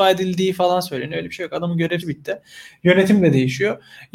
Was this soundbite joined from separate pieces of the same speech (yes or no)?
yes